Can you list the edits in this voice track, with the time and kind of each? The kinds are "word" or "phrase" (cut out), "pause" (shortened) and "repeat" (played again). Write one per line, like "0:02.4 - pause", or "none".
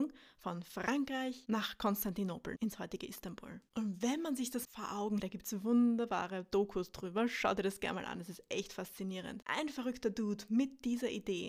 0:04.6 - word
0:05.2 - word